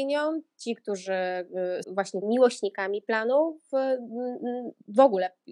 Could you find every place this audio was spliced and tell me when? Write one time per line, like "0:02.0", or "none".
0:01.8
0:02.2